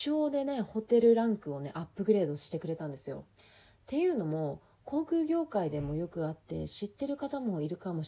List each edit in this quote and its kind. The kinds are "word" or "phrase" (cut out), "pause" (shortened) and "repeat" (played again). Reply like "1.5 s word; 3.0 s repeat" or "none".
3.3 s pause